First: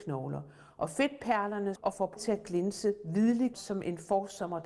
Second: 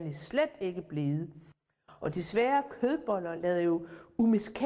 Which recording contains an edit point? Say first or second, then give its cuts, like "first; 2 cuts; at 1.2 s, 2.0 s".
first; 3 cuts; at 1.8 s, 2.2 s, 3.5 s